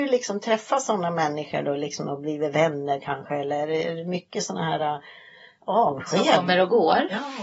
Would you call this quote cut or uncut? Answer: uncut